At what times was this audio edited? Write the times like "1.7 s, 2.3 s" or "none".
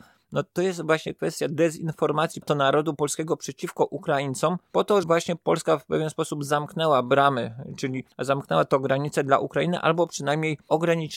2.4 s, 5.0 s, 8.1 s